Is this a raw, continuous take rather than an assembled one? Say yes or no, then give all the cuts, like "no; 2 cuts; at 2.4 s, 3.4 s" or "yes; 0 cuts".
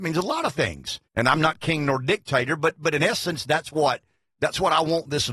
no; 1 cut; at 1.1 s